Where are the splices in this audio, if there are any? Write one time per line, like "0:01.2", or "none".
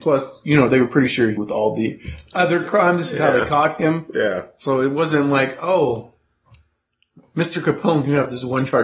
0:01.4